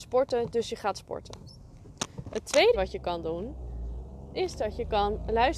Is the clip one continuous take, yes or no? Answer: no